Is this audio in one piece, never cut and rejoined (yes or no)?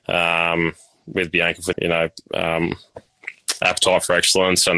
no